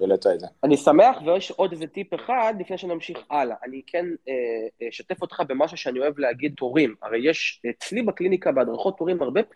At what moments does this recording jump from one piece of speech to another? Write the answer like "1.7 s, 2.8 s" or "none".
3.8 s, 6.6 s, 7.6 s